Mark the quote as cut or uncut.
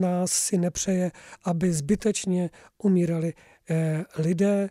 uncut